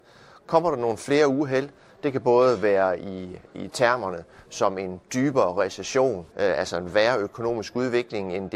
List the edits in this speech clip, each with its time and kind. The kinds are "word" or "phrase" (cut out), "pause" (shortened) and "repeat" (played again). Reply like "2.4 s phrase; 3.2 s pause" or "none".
6.3 s pause